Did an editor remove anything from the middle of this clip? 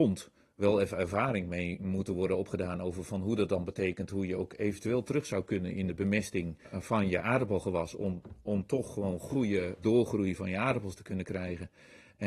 no; 0 cuts

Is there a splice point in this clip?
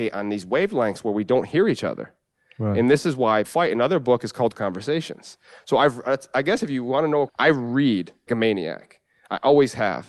yes; 4 cuts; at 3.4 s, 4.5 s, 7.3 s, 8.3 s

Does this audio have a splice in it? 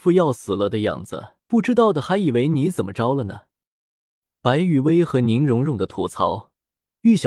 yes; 1 cut; at 1.4 s

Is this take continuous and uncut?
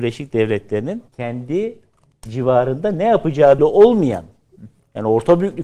no; 2 cuts; at 1.1 s, 3.6 s

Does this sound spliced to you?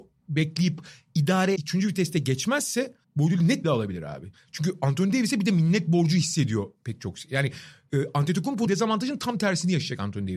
yes; 4 cuts; at 1.6 s, 3.0 s, 3.6 s, 8.7 s

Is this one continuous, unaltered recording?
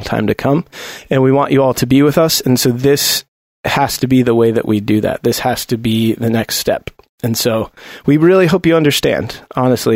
yes; 0 cuts

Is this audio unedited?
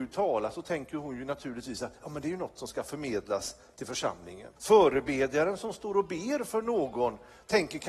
no; 1 cut; at 4.6 s

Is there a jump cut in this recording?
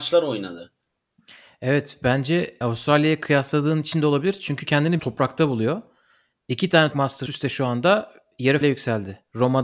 yes; 6 cuts; at 2.6 s, 4.6 s, 5.0 s, 6.9 s, 7.3 s, 8.6 s

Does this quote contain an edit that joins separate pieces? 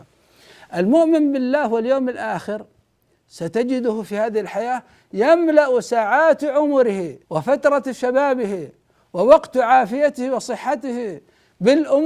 yes; 1 cut; at 7.2 s

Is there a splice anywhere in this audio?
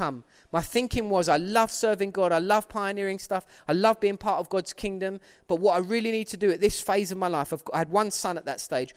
no; 0 cuts

